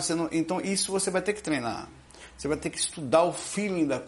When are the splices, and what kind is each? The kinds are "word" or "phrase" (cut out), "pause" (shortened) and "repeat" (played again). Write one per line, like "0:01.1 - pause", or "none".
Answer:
none